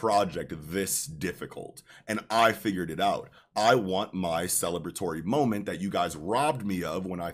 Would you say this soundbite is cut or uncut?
uncut